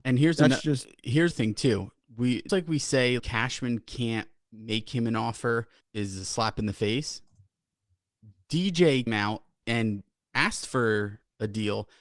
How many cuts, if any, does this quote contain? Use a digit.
6